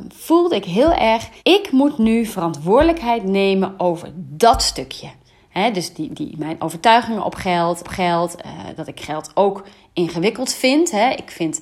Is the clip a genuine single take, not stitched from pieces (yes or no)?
no